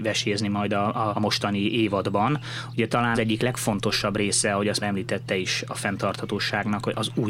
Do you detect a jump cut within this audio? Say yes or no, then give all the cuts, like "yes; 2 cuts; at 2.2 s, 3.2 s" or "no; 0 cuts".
yes; 3 cuts; at 1.1 s, 3.1 s, 4.8 s